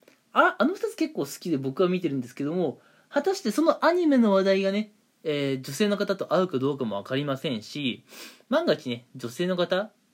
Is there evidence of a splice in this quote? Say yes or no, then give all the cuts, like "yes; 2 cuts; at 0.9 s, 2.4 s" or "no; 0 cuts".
no; 0 cuts